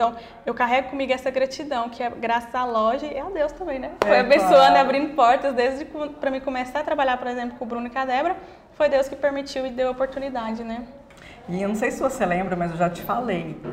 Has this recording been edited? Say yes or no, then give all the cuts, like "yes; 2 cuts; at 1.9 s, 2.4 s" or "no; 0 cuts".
no; 0 cuts